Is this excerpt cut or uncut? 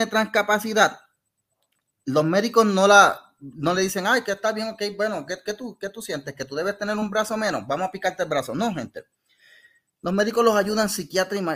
uncut